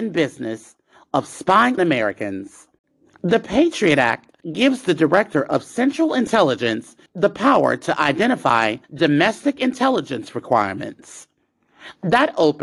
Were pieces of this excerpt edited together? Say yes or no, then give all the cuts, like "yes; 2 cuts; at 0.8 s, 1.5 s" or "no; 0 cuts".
yes; 4 cuts; at 1.8 s, 4.4 s, 7.1 s, 8.8 s